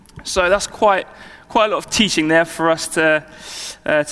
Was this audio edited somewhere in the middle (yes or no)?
no